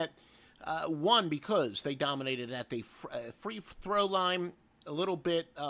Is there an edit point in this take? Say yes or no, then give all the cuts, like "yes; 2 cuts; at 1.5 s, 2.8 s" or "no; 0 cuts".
no; 0 cuts